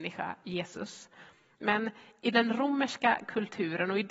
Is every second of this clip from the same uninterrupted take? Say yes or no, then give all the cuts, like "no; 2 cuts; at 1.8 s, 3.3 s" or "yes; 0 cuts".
yes; 0 cuts